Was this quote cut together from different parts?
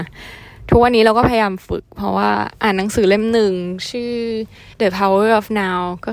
yes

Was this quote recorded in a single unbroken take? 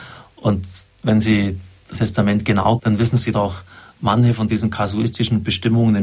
no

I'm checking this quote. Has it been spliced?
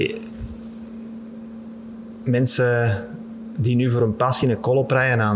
no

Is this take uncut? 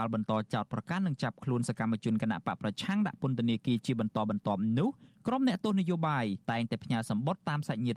no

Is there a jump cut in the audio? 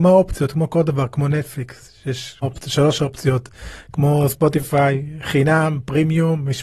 yes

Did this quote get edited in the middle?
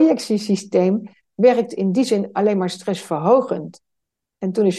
no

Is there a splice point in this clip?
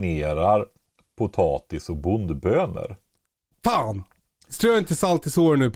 no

